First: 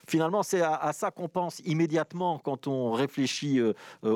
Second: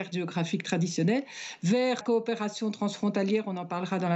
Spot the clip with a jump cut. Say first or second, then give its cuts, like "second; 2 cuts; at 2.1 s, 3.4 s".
second; 1 cut; at 2.0 s